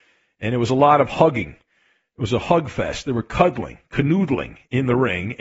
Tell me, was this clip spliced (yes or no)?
no